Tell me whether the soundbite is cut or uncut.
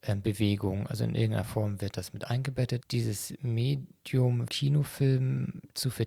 cut